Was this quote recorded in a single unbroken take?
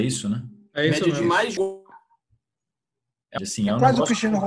no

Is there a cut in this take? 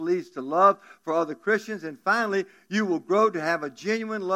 no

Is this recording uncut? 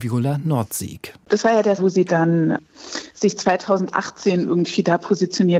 no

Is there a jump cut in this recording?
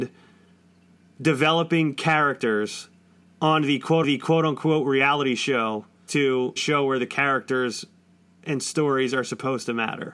yes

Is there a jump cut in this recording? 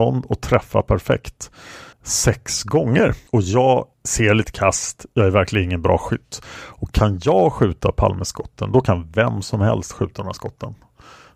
yes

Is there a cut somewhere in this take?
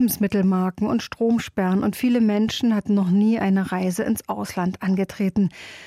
no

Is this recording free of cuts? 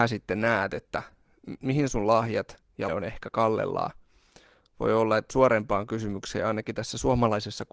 no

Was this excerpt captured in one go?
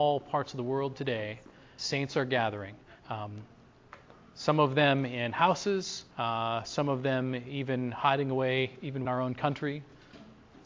no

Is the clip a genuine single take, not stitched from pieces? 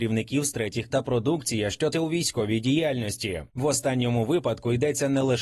no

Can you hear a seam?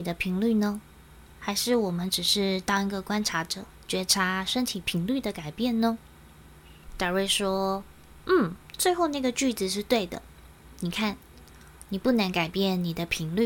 yes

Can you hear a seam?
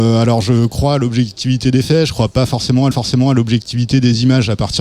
yes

